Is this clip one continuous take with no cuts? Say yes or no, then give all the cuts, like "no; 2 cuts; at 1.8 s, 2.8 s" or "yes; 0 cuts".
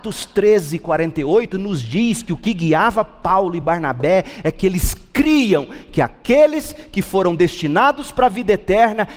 yes; 0 cuts